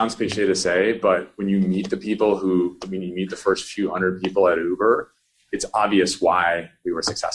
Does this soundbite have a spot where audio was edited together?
no; 0 cuts

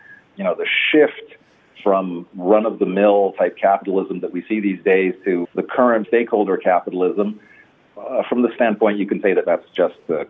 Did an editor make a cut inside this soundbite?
yes; 3 cuts; at 5.4 s, 6.0 s, 8.6 s

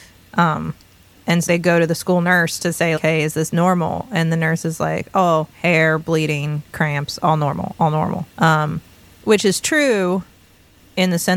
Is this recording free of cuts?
no; 4 cuts; at 1.5 s, 3.0 s, 5.5 s, 8.3 s

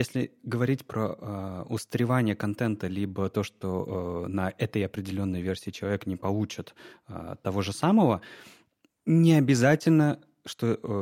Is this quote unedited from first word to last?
yes; 0 cuts

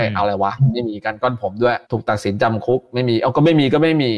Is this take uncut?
no; 1 cut; at 1.8 s

